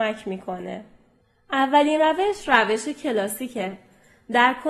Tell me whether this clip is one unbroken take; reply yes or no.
yes